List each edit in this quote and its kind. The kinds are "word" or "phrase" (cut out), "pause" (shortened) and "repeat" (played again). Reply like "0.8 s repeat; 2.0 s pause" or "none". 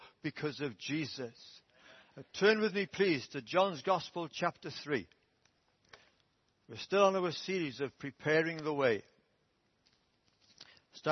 none